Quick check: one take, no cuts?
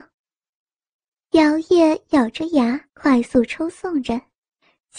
no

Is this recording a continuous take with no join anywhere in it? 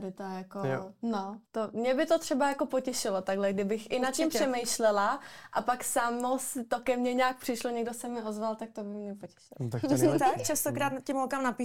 no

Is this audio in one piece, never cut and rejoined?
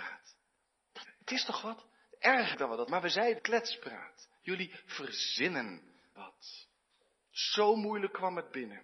no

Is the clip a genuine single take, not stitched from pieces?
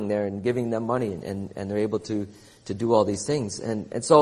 yes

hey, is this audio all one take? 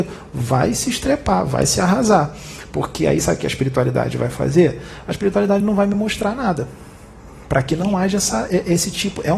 yes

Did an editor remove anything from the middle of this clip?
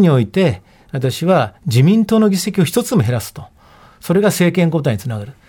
no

